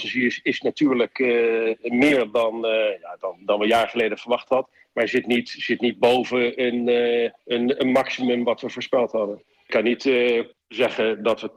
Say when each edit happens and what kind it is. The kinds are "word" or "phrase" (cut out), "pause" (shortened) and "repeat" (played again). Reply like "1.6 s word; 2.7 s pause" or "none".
7.4 s pause